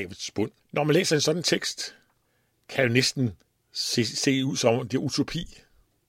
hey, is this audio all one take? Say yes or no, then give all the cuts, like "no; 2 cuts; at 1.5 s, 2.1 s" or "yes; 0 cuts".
no; 2 cuts; at 2.3 s, 3.5 s